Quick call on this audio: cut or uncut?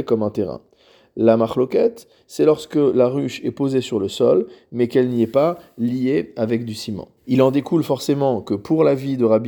cut